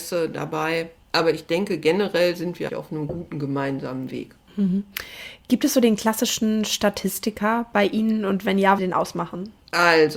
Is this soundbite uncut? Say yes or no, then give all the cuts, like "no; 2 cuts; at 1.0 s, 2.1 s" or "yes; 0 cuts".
no; 3 cuts; at 1.0 s, 2.7 s, 8.8 s